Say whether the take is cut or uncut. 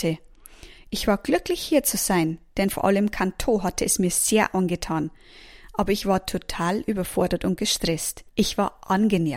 cut